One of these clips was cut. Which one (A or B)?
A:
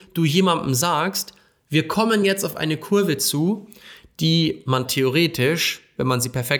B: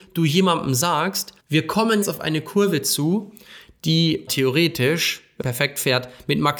B